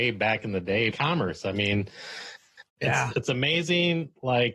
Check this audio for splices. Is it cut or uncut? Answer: cut